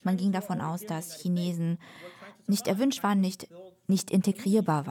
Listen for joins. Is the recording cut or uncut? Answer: uncut